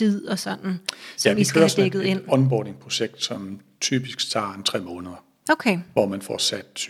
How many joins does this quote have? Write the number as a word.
zero